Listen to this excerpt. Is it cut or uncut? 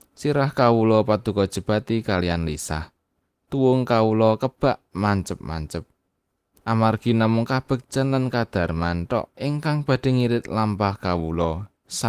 uncut